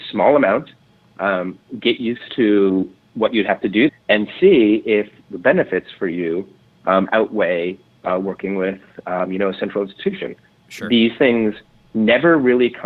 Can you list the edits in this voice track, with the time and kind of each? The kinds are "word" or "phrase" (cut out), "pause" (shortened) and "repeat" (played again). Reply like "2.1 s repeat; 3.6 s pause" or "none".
3.9 s word